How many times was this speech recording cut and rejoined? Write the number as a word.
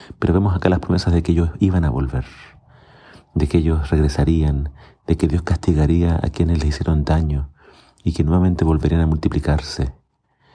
zero